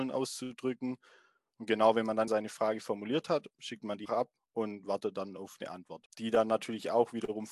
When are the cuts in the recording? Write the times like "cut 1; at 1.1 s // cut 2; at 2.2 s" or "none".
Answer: cut 1; at 2.3 s // cut 2; at 4.1 s